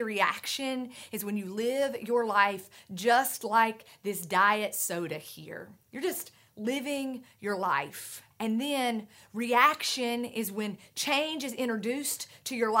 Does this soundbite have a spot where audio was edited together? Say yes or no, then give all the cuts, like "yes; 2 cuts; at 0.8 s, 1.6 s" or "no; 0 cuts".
yes; 2 cuts; at 5.8 s, 8.3 s